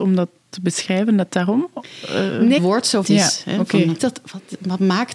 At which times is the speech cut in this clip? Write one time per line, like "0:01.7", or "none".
0:02.6
0:03.0
0:04.0